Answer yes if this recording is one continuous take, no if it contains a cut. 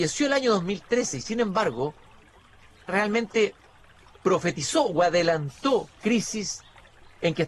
no